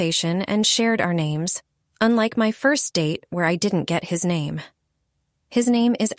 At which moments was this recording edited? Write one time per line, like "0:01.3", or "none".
none